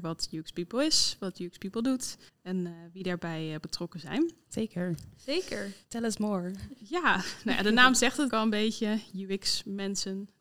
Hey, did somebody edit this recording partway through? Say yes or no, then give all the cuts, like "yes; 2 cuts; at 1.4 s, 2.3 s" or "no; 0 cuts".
yes; 3 cuts; at 2.3 s, 5.8 s, 8.3 s